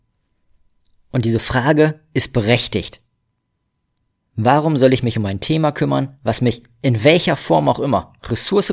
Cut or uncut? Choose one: uncut